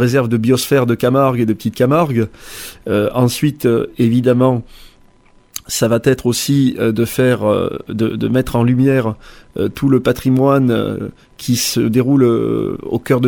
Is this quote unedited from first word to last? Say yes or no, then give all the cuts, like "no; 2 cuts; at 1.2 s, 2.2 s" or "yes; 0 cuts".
yes; 0 cuts